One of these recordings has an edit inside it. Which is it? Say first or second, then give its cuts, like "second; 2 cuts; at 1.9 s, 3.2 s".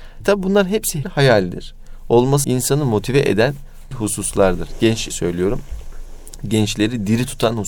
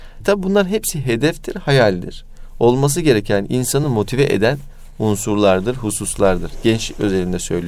first; 4 cuts; at 1.0 s, 2.4 s, 3.9 s, 5.1 s